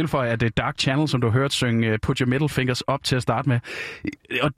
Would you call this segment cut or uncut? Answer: uncut